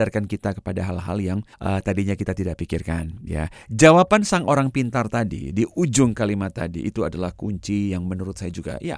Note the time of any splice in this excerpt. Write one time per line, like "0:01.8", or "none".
0:01.5